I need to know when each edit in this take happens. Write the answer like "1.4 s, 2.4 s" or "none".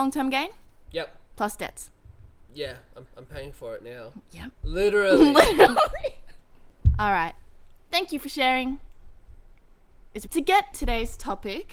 1.3 s, 3.1 s, 4.5 s, 10.3 s, 10.7 s